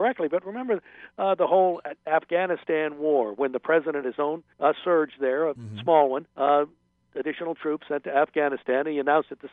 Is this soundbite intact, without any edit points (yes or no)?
no